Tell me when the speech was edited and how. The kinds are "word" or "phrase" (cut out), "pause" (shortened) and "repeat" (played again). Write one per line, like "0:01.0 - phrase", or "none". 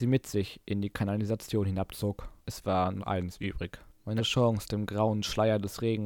0:02.4 - pause
0:03.0 - word
0:04.2 - word